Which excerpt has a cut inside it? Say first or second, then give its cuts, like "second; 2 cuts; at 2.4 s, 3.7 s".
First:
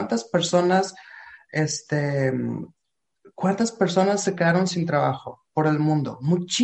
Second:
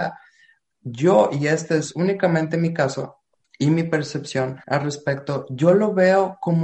second; 2 cuts; at 3.4 s, 4.6 s